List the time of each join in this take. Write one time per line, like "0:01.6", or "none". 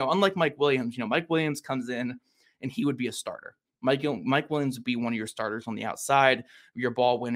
none